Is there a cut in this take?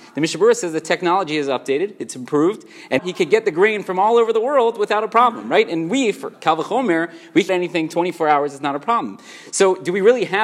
yes; 3 cuts; at 3.0 s, 6.3 s, 7.5 s

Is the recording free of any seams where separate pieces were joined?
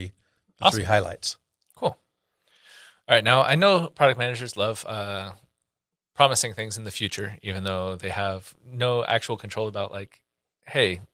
yes; 0 cuts

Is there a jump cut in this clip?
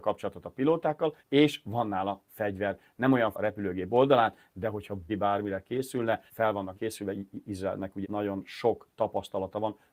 yes; 6 cuts; at 1.2 s, 3.3 s, 5.1 s, 6.3 s, 6.7 s, 8.0 s

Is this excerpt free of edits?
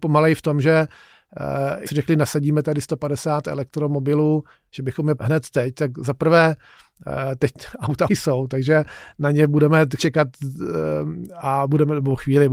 no; 4 cuts; at 1.9 s, 5.2 s, 8.1 s, 10.0 s

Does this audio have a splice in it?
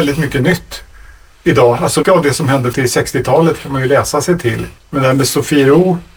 yes; 3 cuts; at 2.0 s, 2.7 s, 4.8 s

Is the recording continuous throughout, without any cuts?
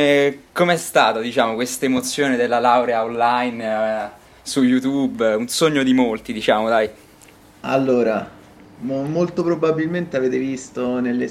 yes; 0 cuts

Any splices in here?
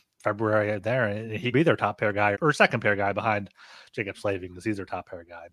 yes; 2 cuts; at 1.5 s, 2.3 s

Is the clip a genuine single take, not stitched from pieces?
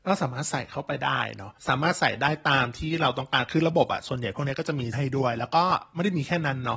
no; 2 cuts; at 1.6 s, 4.9 s

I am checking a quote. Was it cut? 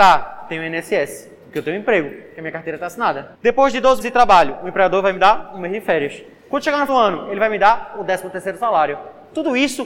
yes; 3 cuts; at 3.3 s, 4.0 s, 6.9 s

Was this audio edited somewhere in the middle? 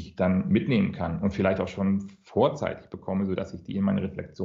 no; 0 cuts

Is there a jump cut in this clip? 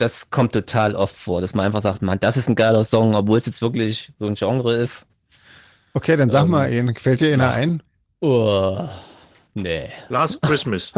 no; 0 cuts

